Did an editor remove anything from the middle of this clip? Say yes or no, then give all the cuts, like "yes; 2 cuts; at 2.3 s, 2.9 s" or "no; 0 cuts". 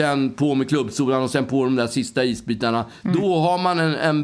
no; 0 cuts